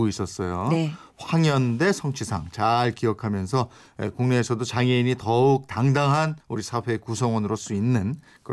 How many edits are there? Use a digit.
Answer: 2